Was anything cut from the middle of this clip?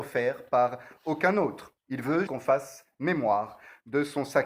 yes; 2 cuts; at 1.8 s, 2.3 s

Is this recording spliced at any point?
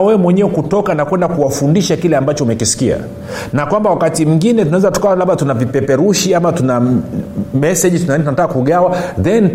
no; 0 cuts

